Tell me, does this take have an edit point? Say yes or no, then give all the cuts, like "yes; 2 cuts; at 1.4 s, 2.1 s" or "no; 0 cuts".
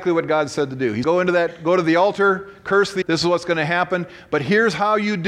yes; 2 cuts; at 1.0 s, 3.0 s